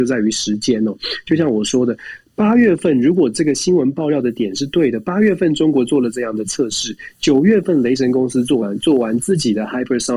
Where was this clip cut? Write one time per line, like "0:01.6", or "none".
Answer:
none